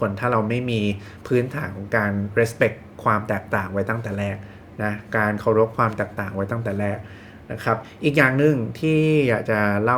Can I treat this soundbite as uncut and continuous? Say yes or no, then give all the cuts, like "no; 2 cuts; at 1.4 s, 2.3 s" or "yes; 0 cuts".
yes; 0 cuts